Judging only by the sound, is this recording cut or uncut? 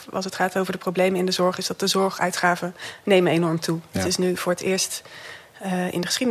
uncut